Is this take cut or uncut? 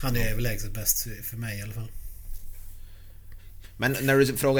uncut